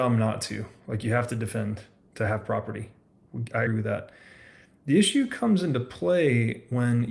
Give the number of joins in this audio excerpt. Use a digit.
1